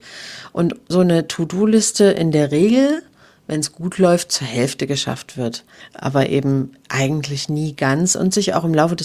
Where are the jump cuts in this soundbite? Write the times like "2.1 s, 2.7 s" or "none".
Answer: none